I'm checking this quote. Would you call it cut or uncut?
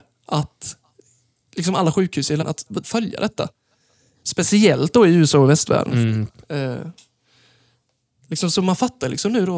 cut